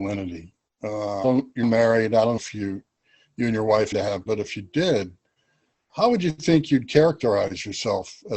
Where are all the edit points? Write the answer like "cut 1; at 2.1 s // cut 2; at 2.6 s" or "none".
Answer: cut 1; at 1.2 s // cut 2; at 1.6 s // cut 3; at 2.4 s // cut 4; at 3.9 s // cut 5; at 4.3 s